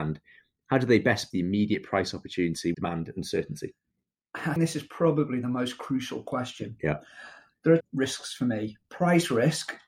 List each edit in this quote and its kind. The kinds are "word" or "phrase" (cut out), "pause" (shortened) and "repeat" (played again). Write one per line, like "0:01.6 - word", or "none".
0:01.3 - word
0:02.7 - word
0:04.6 - word
0:07.8 - word